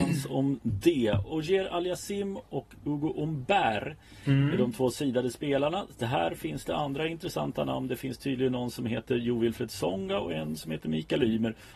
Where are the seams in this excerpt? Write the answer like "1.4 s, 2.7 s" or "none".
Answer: none